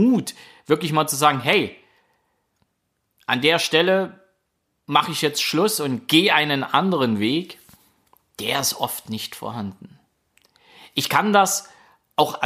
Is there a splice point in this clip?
no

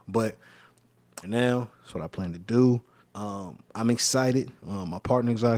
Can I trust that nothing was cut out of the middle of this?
no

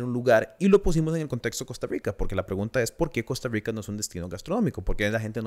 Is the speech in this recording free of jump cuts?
yes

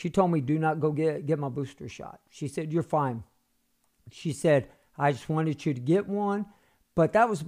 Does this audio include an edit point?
no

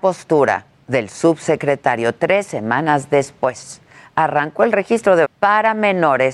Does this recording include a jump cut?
yes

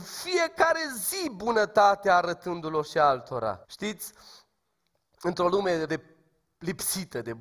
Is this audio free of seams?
no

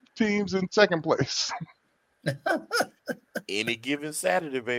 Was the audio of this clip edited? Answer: no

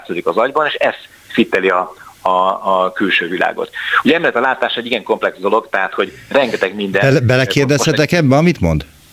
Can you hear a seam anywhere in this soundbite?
no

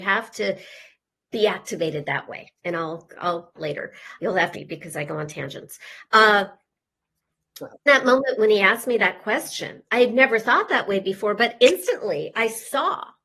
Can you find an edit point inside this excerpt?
yes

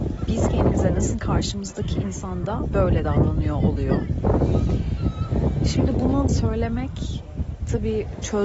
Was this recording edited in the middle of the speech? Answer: yes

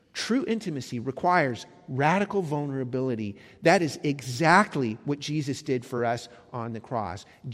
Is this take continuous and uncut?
yes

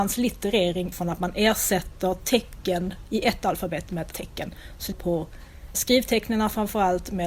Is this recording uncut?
no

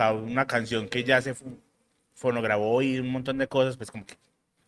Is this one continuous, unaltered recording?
yes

